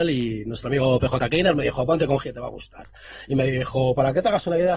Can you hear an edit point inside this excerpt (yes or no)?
yes